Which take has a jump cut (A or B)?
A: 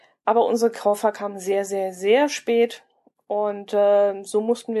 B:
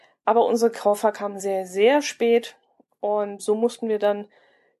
B